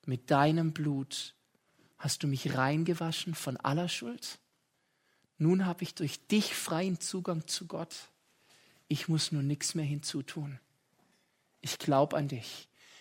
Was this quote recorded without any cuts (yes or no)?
yes